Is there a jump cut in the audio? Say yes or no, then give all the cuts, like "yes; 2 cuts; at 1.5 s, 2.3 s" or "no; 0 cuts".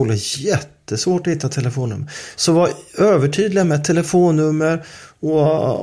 no; 0 cuts